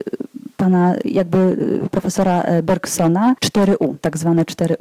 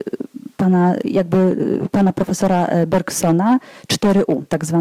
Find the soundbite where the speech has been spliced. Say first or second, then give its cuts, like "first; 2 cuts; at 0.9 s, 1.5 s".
first; 2 cuts; at 1.9 s, 3.4 s